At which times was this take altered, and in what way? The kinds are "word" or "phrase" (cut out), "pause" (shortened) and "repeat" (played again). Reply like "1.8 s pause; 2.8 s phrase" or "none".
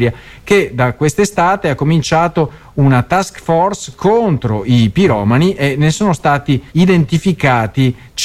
6.7 s pause